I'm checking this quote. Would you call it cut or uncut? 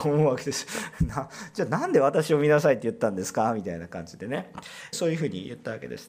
cut